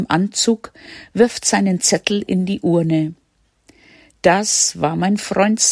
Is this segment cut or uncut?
uncut